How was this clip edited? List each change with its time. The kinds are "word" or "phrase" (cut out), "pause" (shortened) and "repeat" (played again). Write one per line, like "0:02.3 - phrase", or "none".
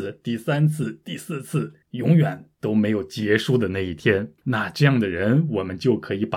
0:01.8 - pause
0:04.4 - pause